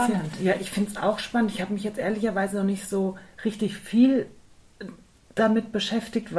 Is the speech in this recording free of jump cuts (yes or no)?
yes